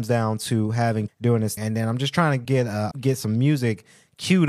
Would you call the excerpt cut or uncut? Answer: cut